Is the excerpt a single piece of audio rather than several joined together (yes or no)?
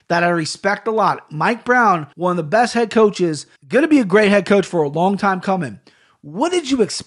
no